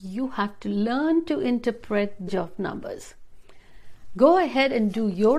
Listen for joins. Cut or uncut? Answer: cut